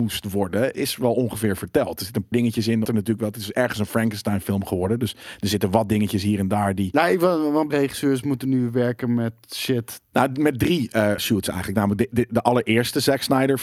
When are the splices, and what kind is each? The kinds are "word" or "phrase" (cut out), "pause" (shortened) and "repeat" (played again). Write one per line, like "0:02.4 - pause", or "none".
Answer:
0:02.3 - word
0:02.8 - word
0:07.7 - word
0:11.2 - word

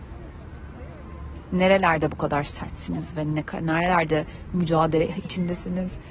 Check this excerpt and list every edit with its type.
none

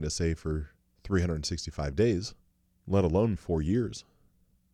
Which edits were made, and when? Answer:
0:02.5 - pause
0:03.4 - word

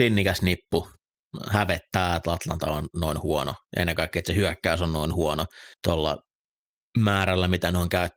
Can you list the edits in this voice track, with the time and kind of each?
0:03.6 - pause
0:05.7 - pause

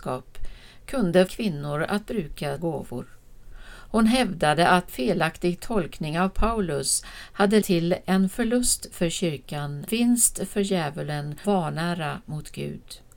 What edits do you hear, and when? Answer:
0:01.3 - word
0:02.6 - word
0:04.9 - word
0:07.6 - word
0:09.9 - word
0:11.4 - word

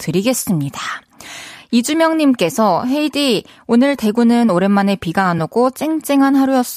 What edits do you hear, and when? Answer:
none

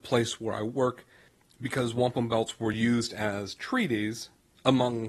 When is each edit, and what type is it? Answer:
none

